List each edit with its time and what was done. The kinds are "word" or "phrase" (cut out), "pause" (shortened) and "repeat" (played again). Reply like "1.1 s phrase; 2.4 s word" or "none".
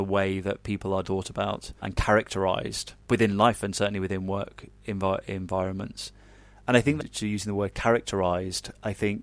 1.0 s phrase; 1.8 s pause; 3.0 s pause